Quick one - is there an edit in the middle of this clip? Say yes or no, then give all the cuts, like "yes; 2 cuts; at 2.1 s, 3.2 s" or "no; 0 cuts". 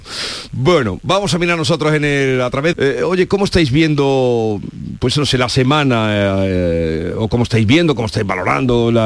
yes; 1 cut; at 2.7 s